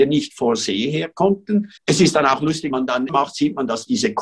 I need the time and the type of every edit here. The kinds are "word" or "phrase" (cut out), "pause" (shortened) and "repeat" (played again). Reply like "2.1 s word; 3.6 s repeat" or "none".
1.8 s pause; 2.7 s word; 3.1 s word